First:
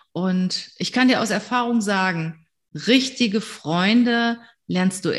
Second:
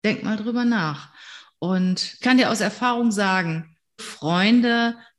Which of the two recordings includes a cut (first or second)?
second